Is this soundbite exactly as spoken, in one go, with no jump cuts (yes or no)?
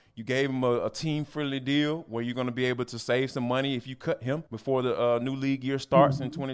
no